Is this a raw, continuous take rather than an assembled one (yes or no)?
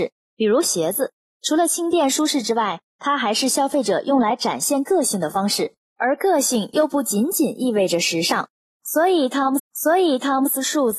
no